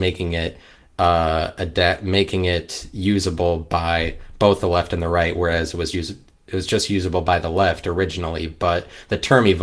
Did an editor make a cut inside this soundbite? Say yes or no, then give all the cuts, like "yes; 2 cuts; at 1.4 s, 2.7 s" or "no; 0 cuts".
yes; 1 cut; at 5.9 s